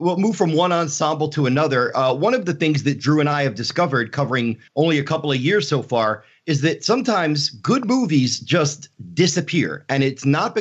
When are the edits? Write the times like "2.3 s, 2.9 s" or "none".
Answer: 4.7 s